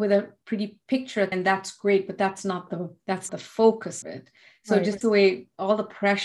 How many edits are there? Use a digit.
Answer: 4